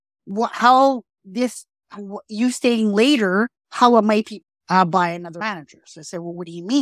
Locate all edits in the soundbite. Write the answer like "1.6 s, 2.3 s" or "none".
3.6 s, 4.5 s

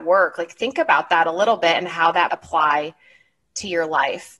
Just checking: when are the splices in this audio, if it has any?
2.3 s

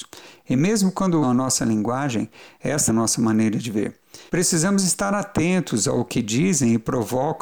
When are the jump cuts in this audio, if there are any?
1.2 s, 2.9 s, 4.3 s

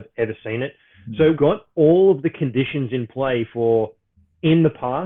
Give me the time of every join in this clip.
1.3 s

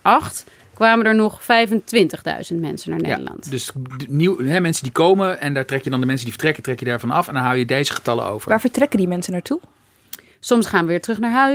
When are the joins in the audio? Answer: none

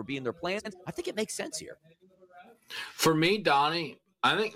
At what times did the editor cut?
none

